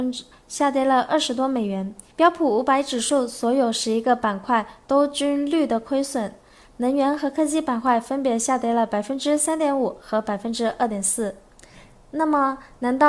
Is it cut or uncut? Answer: cut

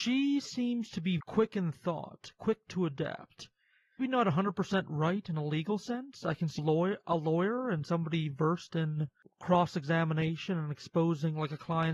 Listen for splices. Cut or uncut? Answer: cut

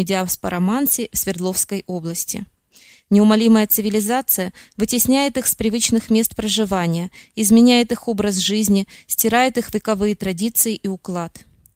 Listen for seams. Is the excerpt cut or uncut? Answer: uncut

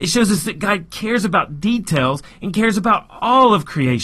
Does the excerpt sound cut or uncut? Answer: uncut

